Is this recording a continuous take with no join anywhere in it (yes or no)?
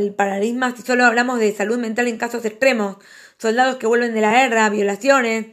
yes